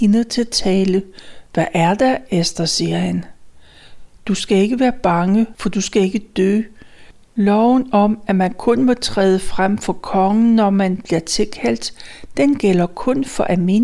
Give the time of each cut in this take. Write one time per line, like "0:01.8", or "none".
none